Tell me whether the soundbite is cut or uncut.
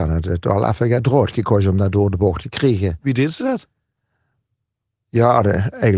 uncut